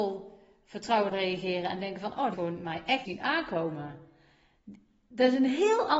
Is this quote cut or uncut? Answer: cut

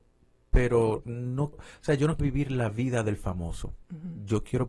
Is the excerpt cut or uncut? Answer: cut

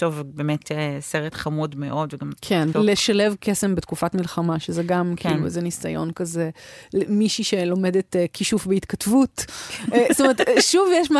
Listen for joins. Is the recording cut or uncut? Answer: cut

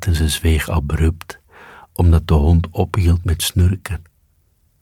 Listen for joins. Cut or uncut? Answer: uncut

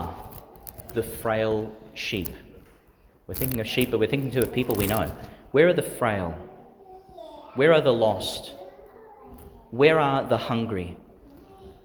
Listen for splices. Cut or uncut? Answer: uncut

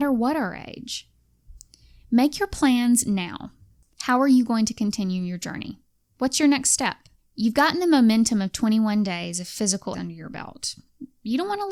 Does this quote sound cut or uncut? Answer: cut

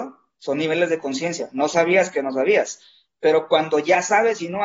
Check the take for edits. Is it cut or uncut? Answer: uncut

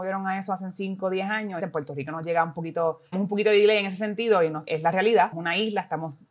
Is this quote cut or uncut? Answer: cut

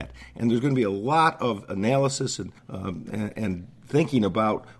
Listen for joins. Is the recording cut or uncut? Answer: cut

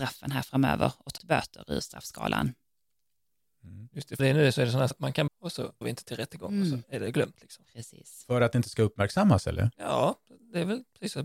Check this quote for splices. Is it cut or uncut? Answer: cut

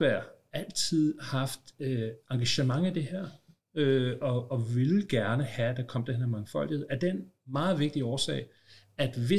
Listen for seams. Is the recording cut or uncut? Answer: uncut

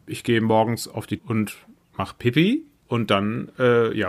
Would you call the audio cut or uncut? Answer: cut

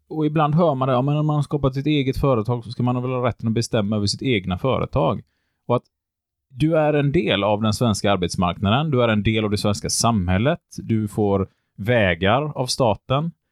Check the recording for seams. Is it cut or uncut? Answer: uncut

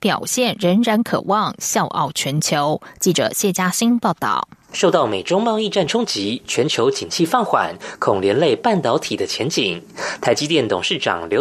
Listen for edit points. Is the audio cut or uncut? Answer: uncut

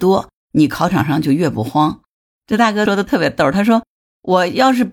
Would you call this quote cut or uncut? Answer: uncut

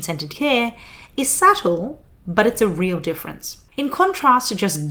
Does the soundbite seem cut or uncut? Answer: cut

